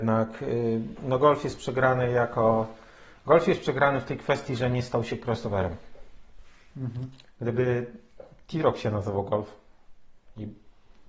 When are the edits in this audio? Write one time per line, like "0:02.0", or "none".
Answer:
none